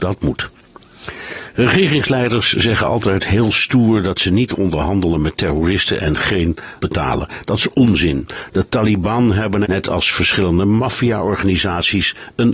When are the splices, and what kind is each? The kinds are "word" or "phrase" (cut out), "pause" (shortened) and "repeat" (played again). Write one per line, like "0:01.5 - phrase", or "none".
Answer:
0:06.8 - word
0:09.6 - word

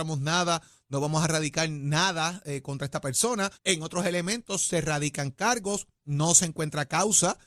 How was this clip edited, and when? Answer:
0:03.5 - pause

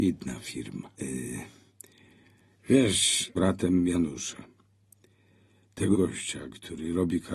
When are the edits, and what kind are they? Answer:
0:00.9 - pause
0:03.3 - phrase
0:05.9 - word

